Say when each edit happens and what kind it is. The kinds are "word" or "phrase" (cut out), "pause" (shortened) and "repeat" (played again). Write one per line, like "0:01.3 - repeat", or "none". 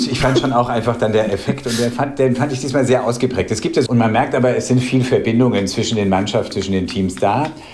0:03.9 - phrase
0:06.5 - word